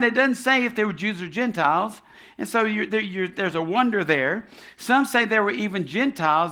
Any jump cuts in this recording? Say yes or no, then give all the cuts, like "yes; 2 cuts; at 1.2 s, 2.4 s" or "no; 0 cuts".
no; 0 cuts